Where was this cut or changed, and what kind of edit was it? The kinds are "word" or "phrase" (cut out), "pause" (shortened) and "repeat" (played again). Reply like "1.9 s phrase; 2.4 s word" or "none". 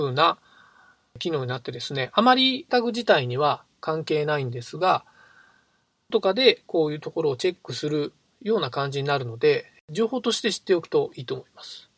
2.7 s word; 6.1 s word